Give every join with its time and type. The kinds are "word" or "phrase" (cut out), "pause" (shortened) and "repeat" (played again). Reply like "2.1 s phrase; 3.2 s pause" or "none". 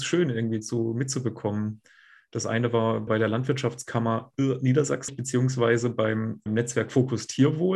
3.1 s word; 5.1 s word; 6.5 s word